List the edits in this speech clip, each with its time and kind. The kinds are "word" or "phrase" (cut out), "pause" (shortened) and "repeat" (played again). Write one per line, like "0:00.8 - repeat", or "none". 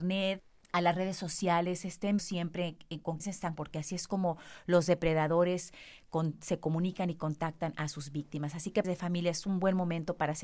0:02.2 - word
0:03.2 - word
0:03.6 - word
0:08.8 - word